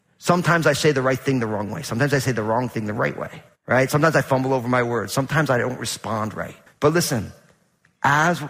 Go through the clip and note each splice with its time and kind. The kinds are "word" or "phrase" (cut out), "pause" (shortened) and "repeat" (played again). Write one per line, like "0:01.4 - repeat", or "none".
0:03.6 - pause
0:06.7 - pause